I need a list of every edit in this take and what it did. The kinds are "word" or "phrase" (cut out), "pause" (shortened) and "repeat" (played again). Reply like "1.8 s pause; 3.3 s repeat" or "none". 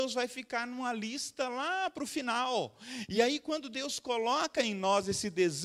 none